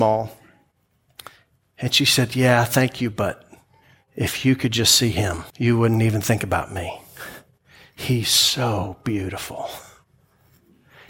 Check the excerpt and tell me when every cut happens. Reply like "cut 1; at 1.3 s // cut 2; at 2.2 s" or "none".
cut 1; at 5.5 s